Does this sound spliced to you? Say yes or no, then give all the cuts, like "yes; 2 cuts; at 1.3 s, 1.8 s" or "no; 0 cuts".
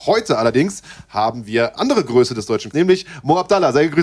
yes; 2 cuts; at 1.8 s, 2.7 s